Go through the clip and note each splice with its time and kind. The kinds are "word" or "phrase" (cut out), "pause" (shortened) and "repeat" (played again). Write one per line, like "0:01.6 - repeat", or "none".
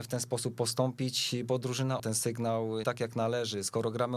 0:02.0 - word
0:02.8 - word